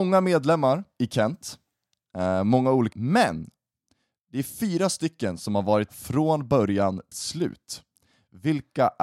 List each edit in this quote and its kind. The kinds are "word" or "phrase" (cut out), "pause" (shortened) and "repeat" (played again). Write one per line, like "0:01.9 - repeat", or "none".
0:02.9 - word
0:05.9 - word
0:07.1 - word